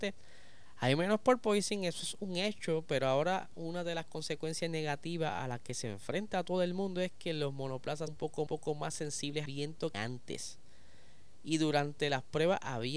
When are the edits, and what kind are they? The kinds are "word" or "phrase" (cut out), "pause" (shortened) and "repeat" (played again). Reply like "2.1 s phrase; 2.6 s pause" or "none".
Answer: 8.1 s word; 8.5 s repeat; 9.5 s word; 9.9 s word